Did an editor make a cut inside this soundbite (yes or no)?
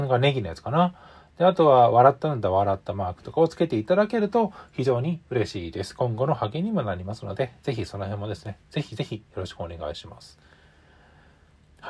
no